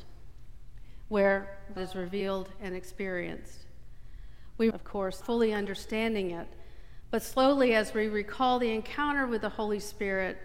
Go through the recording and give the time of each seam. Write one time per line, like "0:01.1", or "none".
0:01.8
0:04.7
0:05.2